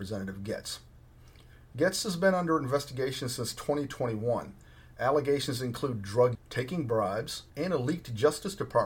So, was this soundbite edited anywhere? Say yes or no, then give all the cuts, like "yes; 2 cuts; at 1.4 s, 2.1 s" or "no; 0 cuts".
yes; 2 cuts; at 6.3 s, 7.5 s